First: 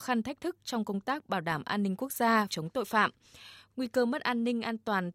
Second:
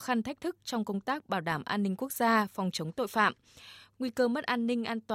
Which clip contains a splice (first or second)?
first